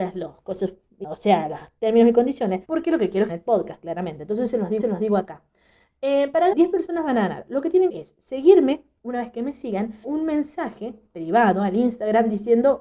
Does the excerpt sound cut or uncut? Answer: cut